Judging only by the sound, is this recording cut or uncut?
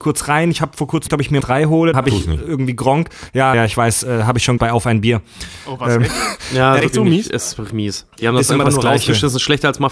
cut